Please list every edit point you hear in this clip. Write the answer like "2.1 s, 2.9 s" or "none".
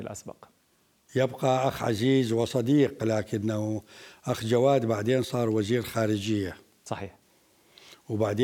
none